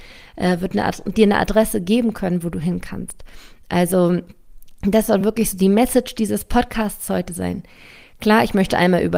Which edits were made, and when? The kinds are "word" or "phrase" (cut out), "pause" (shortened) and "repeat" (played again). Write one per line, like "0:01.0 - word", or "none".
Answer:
none